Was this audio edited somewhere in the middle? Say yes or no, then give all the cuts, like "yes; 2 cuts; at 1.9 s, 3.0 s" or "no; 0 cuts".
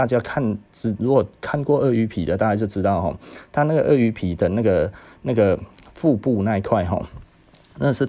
no; 0 cuts